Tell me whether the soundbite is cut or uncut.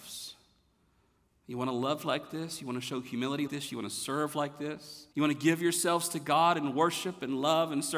cut